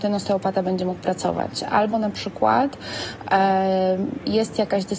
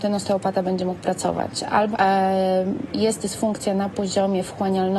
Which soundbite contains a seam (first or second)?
second